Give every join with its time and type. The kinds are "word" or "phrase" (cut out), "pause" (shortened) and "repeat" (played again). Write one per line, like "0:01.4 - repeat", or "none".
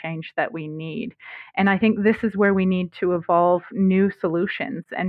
none